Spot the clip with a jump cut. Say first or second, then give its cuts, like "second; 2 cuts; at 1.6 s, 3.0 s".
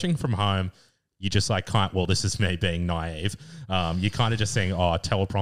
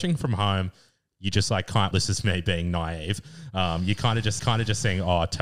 second; 2 cuts; at 1.9 s, 4.4 s